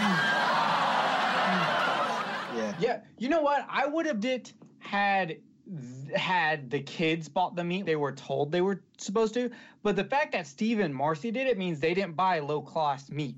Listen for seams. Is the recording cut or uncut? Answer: cut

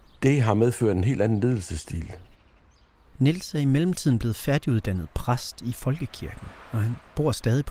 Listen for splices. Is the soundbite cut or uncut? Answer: uncut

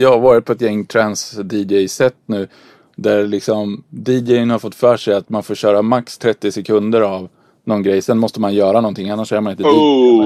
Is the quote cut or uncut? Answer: uncut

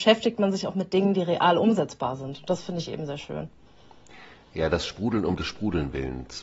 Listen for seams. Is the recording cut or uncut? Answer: uncut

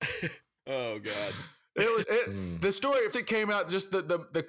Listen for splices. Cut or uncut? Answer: cut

